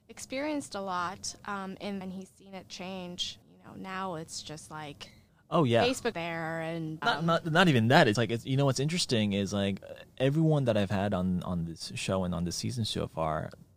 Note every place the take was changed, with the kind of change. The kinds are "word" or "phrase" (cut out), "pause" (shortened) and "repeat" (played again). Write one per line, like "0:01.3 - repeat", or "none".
0:02.0 - phrase
0:03.4 - pause
0:05.3 - pause
0:06.1 - word
0:07.0 - word
0:08.1 - word